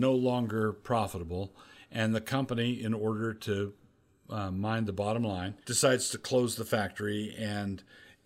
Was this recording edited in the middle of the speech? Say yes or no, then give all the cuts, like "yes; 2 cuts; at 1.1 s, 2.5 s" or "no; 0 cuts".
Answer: no; 0 cuts